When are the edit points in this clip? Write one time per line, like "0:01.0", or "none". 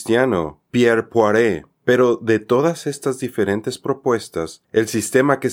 0:01.7